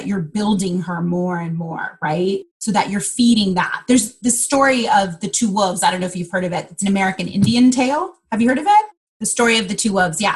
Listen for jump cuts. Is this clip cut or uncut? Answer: cut